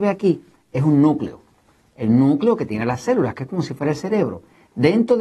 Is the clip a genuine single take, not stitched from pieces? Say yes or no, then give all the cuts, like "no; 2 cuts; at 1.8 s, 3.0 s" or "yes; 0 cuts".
yes; 0 cuts